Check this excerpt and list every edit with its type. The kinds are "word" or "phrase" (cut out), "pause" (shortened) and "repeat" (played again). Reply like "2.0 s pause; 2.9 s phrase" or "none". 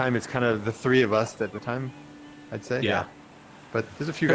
1.5 s phrase